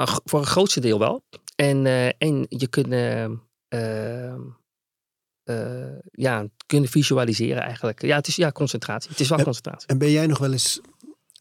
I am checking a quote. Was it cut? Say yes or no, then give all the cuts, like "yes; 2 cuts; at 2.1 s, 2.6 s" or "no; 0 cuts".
yes; 1 cut; at 1.4 s